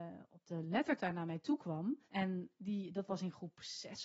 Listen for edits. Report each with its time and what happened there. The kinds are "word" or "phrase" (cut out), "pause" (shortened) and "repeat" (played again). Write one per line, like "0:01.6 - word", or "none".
0:02.0 - pause